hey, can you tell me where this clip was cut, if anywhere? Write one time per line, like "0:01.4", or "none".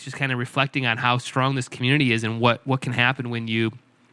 none